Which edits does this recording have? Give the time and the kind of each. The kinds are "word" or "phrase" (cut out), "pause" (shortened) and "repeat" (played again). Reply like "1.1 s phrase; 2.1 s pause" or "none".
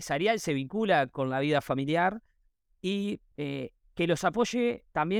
3.3 s pause